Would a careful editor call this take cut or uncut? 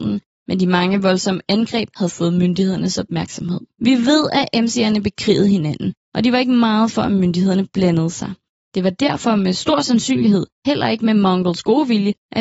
uncut